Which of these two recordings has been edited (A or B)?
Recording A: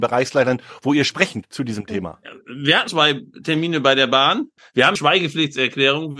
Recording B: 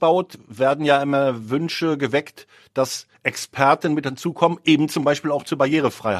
A